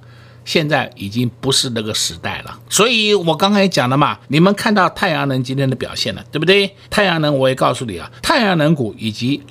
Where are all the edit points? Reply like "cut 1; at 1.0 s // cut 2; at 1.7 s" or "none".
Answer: cut 1; at 2.6 s // cut 2; at 4.2 s // cut 3; at 6.8 s // cut 4; at 8.2 s